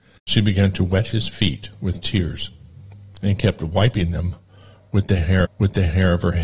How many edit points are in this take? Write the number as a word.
one